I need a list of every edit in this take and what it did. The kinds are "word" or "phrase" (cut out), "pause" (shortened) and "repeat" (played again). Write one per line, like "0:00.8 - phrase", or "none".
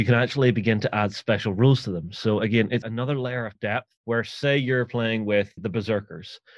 0:02.8 - word
0:03.6 - word
0:04.0 - pause
0:05.6 - word